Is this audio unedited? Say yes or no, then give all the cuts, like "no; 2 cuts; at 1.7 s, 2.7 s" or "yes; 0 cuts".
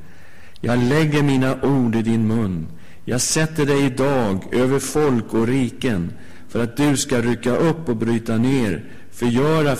yes; 0 cuts